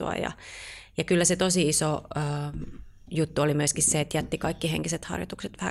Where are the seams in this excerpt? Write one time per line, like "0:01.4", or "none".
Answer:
none